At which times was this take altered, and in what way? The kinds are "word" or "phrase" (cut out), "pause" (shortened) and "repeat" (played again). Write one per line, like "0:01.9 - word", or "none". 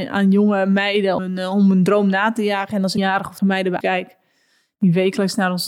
0:01.2 - word
0:03.0 - phrase
0:03.4 - word
0:03.8 - word